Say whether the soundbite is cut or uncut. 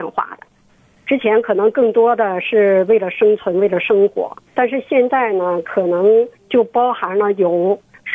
cut